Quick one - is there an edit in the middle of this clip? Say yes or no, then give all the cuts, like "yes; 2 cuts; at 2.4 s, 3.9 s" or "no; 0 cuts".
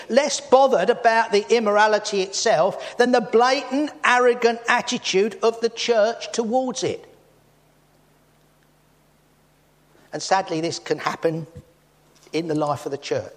no; 0 cuts